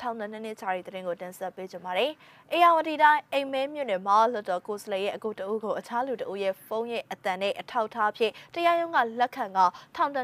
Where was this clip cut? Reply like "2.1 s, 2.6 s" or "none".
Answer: none